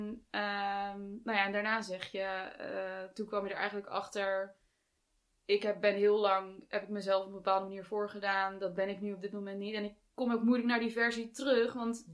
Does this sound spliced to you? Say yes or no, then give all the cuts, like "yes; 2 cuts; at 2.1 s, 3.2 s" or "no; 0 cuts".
no; 0 cuts